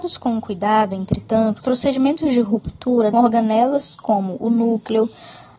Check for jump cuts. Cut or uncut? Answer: cut